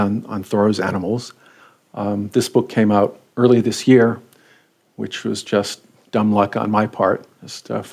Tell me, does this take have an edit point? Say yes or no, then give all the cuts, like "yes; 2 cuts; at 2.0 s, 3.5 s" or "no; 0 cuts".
no; 0 cuts